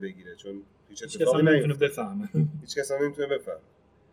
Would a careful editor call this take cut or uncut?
uncut